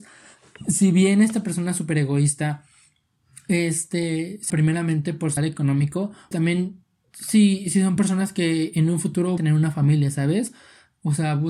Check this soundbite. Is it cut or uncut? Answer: cut